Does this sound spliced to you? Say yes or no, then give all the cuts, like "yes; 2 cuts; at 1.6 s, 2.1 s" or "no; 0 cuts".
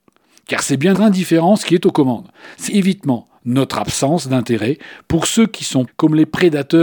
yes; 3 cuts; at 0.9 s, 2.7 s, 5.9 s